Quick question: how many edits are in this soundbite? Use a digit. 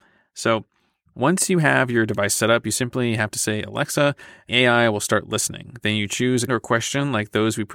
2